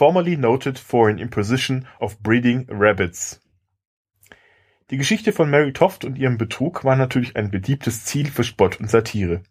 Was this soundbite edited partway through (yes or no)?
no